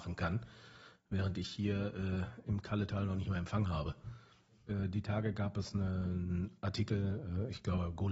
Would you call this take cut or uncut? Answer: uncut